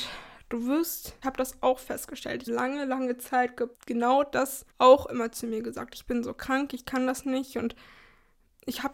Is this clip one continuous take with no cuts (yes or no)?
no